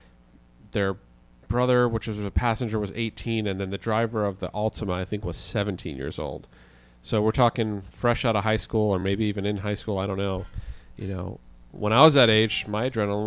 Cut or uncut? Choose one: uncut